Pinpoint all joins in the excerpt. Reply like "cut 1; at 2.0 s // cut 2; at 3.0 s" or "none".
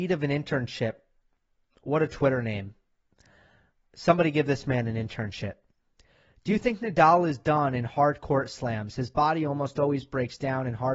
none